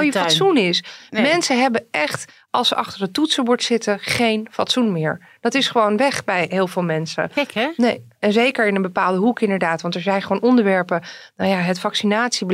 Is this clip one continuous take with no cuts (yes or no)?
yes